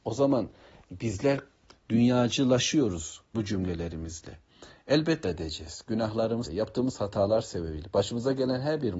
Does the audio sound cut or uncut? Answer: cut